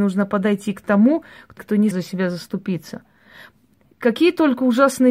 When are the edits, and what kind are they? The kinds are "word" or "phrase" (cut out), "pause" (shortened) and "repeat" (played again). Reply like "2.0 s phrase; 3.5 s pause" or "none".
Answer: 1.6 s word; 1.9 s word